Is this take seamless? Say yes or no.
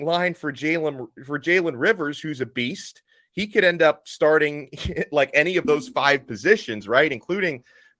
yes